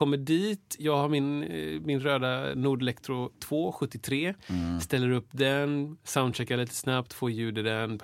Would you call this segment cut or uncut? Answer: cut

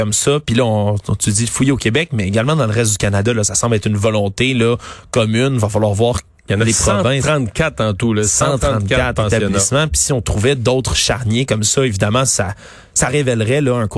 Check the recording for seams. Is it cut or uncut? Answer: uncut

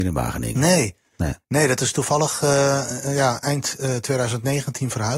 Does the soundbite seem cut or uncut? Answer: uncut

